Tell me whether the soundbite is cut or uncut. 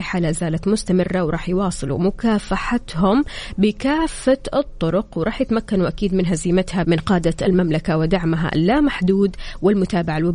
cut